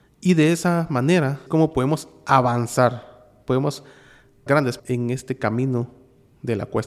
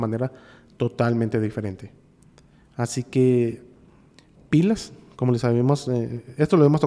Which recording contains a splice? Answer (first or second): first